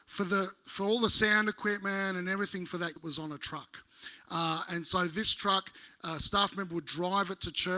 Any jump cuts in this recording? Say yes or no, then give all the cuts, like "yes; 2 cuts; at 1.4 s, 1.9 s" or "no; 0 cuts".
yes; 1 cut; at 3.0 s